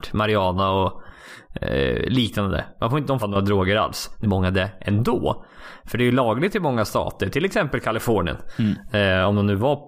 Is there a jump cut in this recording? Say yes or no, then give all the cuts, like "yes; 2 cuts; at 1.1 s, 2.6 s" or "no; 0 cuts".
yes; 2 cuts; at 3.2 s, 4.2 s